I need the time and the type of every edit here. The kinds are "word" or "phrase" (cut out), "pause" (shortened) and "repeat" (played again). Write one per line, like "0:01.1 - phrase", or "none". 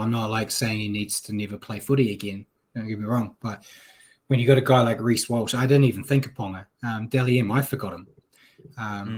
none